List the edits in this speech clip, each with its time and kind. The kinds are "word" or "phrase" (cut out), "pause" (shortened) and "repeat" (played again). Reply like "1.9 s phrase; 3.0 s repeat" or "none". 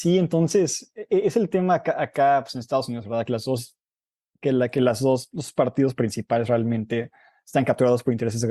none